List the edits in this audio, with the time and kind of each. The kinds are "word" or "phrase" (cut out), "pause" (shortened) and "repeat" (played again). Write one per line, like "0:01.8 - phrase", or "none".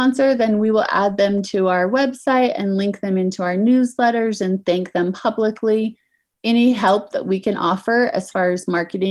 none